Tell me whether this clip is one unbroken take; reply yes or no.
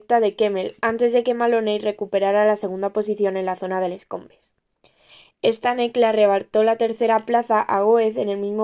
yes